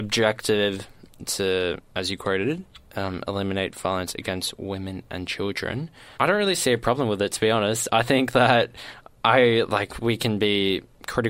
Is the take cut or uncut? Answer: cut